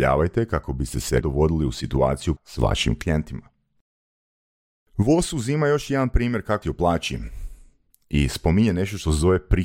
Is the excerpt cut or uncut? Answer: cut